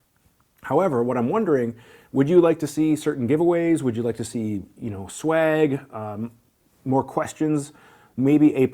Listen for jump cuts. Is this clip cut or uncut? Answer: uncut